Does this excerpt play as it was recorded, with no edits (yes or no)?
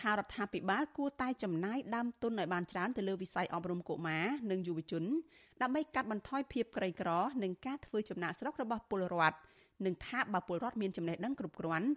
yes